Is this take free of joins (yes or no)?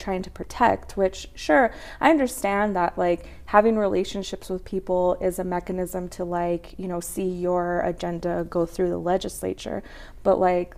yes